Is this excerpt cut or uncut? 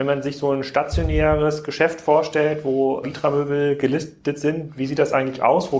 cut